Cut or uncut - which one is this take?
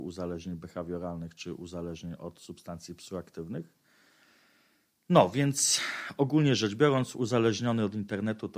uncut